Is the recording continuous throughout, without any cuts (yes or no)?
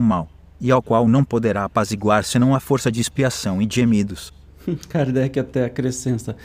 yes